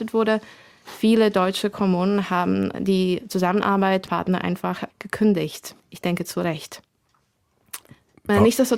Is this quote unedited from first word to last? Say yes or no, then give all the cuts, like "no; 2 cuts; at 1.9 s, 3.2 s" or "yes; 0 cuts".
no; 2 cuts; at 4.1 s, 5.8 s